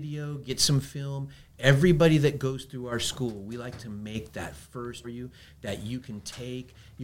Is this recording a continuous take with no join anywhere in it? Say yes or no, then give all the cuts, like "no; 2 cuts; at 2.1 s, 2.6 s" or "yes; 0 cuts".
no; 1 cut; at 5.0 s